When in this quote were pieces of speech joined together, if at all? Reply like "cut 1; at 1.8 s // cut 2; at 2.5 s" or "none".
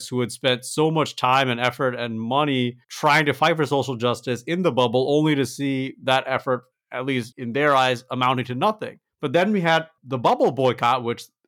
cut 1; at 2.8 s